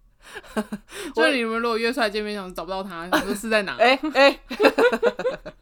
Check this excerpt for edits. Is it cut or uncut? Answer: uncut